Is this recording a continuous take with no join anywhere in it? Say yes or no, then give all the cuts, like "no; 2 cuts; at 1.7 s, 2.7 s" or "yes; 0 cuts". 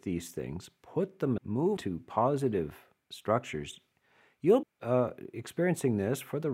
no; 3 cuts; at 1.4 s, 1.8 s, 4.6 s